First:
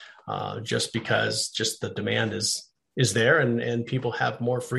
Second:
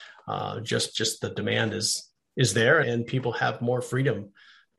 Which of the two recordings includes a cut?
second; 2 cuts; at 0.9 s, 2.8 s

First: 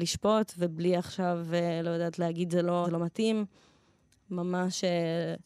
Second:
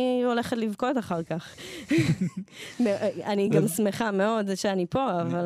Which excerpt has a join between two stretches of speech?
first; 1 cut; at 2.8 s

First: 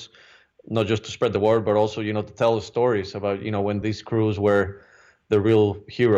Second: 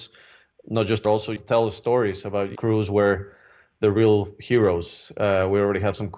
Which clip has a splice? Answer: second; 3 cuts; at 1.0 s, 1.4 s, 2.5 s

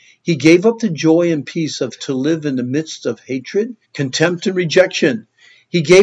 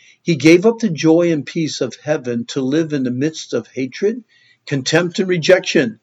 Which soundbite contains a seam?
first; 2 cuts; at 2.0 s, 3.8 s

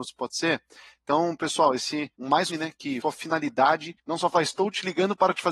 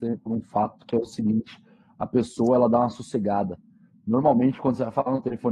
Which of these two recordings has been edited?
first; 4 cuts; at 2.1 s, 2.5 s, 3.0 s, 4.0 s

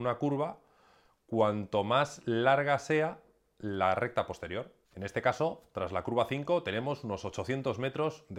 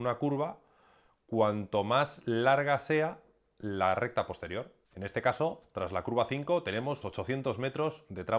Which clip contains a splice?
second; 1 cut; at 7.0 s

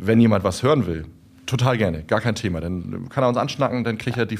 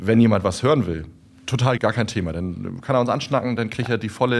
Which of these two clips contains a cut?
second; 1 cut; at 1.8 s

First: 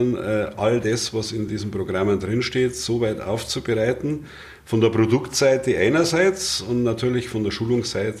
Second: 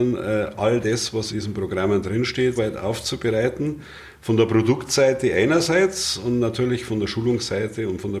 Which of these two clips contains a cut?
second; 2 cuts; at 1.3 s, 2.6 s

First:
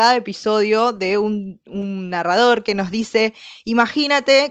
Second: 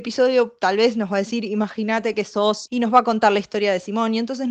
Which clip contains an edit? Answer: second; 1 cut; at 2.7 s

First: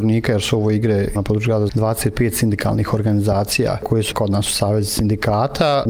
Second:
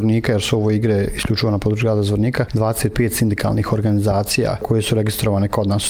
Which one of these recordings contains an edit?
first; 3 cuts; at 1.1 s, 1.7 s, 4.1 s

